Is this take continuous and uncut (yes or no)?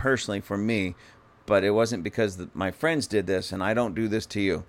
yes